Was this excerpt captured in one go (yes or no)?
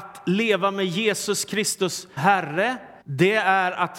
no